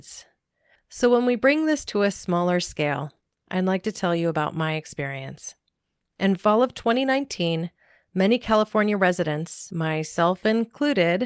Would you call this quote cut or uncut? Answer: uncut